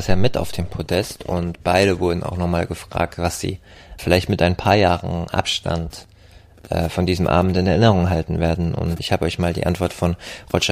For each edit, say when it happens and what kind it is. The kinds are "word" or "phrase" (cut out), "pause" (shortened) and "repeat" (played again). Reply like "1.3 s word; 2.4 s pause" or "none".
4.0 s word; 9.0 s word